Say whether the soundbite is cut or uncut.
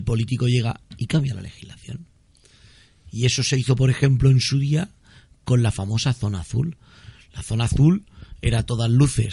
uncut